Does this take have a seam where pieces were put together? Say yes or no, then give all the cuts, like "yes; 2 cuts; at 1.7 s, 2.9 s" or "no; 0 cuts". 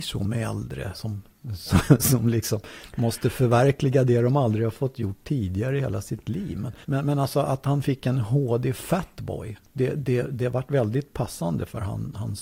yes; 2 cuts; at 0.9 s, 6.8 s